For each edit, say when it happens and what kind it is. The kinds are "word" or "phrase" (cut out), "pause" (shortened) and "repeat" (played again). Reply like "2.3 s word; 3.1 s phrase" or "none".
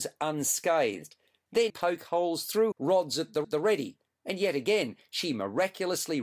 1.7 s phrase; 2.7 s word; 3.4 s repeat